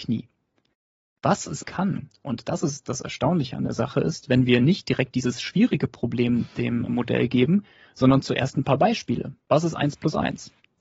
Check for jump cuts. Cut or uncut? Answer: cut